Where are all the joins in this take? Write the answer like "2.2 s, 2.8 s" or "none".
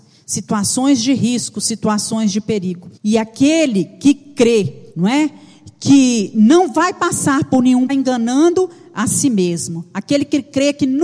3.0 s, 4.9 s, 7.9 s